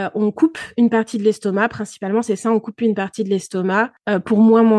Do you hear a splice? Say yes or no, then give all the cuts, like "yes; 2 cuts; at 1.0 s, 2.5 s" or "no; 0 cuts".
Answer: no; 0 cuts